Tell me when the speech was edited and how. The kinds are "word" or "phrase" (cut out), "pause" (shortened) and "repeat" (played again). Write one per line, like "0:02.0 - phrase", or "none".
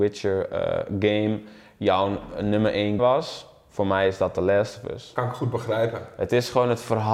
0:03.0 - word